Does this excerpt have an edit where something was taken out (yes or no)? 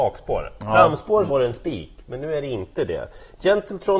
yes